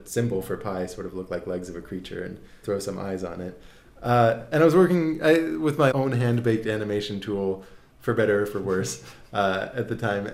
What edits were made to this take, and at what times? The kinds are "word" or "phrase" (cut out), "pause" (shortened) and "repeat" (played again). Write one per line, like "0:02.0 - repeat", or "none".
0:02.6 - word
0:05.9 - word